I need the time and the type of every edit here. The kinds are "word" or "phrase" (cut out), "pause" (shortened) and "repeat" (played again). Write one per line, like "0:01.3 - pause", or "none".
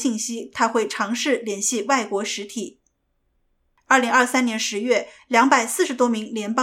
none

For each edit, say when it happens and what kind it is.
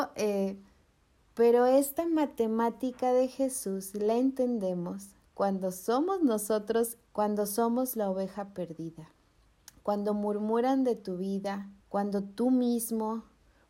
0:07.1 - phrase
0:09.6 - pause
0:11.8 - pause

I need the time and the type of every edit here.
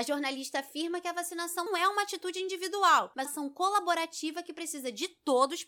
0:01.7 - word
0:03.3 - word

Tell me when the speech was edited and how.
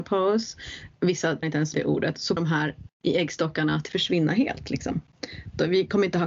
0:01.0 - word
0:01.4 - word
0:01.7 - word
0:02.4 - word
0:02.9 - word
0:03.9 - word

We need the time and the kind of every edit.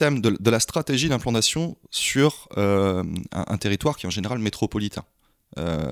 none

